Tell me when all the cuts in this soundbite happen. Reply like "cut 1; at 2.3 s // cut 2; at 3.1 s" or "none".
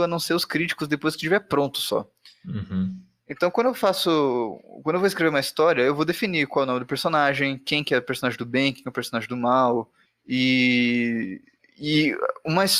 none